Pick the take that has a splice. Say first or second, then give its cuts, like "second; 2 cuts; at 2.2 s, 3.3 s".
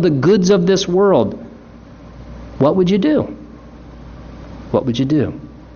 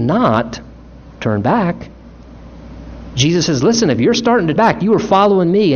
second; 1 cut; at 4.6 s